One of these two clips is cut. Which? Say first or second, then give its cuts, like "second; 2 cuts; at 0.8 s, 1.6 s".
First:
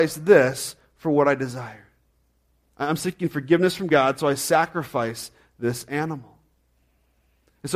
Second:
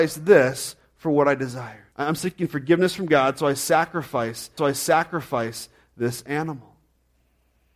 second; 2 cuts; at 1.9 s, 4.6 s